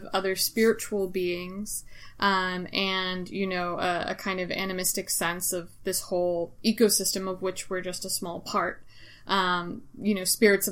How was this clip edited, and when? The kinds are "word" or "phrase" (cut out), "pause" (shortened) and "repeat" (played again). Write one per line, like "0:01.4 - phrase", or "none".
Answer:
none